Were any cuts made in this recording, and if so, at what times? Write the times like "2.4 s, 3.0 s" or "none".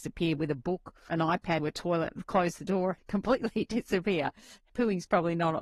1.1 s, 1.6 s, 3.0 s, 4.7 s